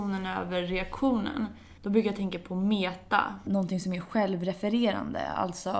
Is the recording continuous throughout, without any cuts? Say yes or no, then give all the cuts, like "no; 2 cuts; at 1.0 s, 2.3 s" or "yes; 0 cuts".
no; 1 cut; at 1.8 s